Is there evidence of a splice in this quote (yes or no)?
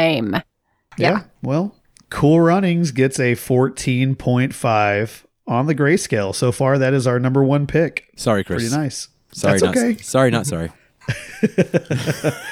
no